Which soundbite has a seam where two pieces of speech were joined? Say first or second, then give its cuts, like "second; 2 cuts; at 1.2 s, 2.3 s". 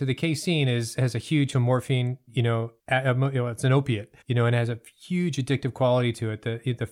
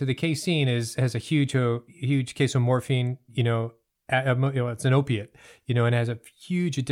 first; 3 cuts; at 1.5 s, 2.8 s, 4.2 s